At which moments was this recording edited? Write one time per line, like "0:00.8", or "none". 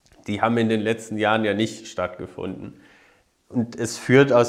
none

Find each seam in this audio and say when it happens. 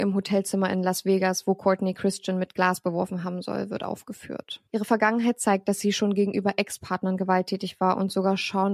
0:04.7

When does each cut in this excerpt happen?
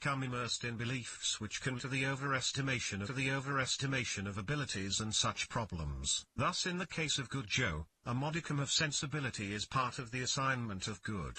0:01.8
0:03.1
0:06.3

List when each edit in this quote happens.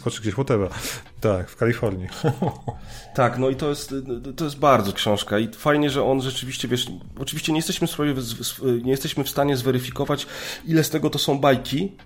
0:04.9

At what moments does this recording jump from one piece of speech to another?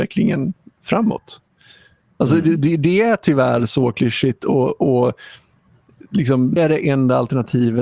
0:06.6

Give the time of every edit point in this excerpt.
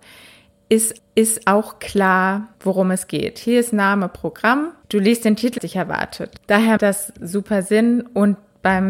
0:01.0
0:02.5
0:05.6
0:06.8

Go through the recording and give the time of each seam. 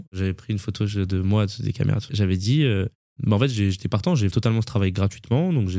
0:02.1
0:04.3

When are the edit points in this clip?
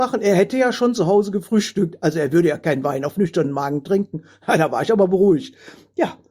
none

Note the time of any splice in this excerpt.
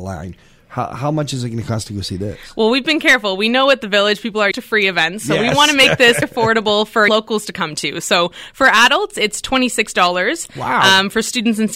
0:04.5
0:06.2
0:07.1

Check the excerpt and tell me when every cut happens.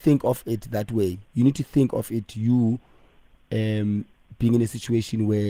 none

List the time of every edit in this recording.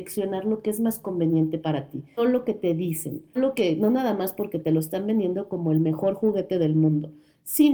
0:02.2
0:03.4

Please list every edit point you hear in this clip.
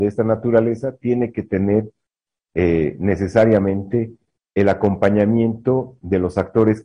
none

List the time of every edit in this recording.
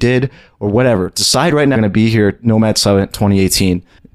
0:01.8

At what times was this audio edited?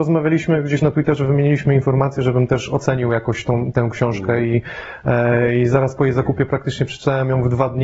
none

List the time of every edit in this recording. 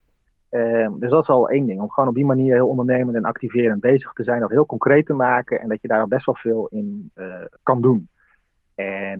0:07.6

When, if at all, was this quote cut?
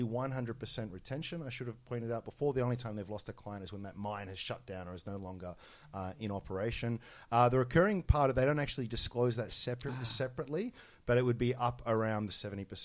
none

